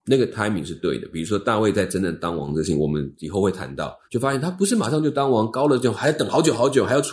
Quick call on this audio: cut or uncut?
cut